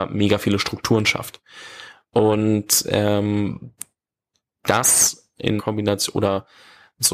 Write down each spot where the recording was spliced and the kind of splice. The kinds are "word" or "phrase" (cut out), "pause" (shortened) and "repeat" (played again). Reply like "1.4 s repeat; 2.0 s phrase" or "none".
5.6 s word